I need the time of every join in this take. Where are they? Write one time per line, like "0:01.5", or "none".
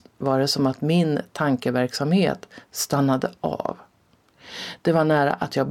none